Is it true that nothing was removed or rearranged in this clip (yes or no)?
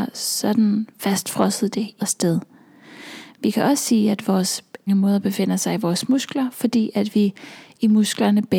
no